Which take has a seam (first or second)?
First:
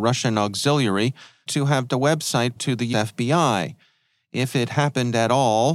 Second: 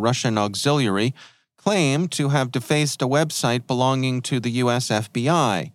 first